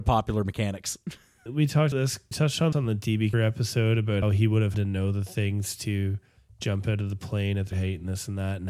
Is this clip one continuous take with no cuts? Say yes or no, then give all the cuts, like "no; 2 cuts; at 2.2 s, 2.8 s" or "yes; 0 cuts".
no; 8 cuts; at 1.5 s, 1.9 s, 2.3 s, 2.7 s, 3.3 s, 4.2 s, 4.7 s, 7.7 s